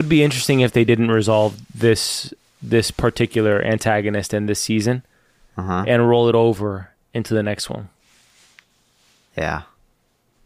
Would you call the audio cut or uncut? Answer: uncut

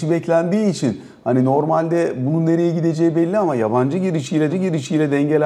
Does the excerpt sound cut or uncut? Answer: cut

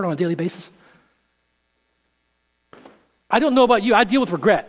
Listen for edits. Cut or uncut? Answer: uncut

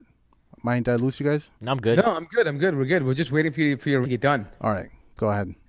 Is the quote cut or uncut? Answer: cut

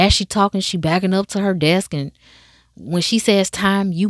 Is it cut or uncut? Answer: uncut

